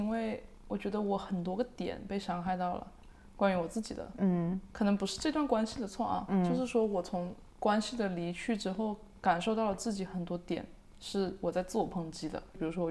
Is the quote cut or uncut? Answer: uncut